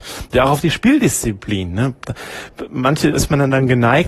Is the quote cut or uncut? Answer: cut